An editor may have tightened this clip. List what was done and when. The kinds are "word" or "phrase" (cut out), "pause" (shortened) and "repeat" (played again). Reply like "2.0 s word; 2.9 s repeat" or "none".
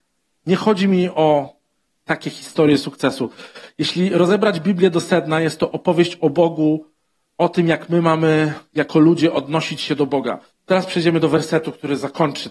10.5 s pause

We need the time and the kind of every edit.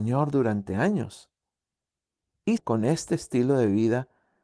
2.6 s word

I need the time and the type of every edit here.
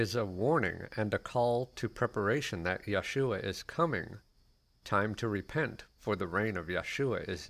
none

